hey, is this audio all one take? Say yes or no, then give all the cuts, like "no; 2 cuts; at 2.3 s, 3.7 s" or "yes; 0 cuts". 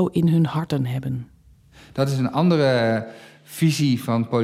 yes; 0 cuts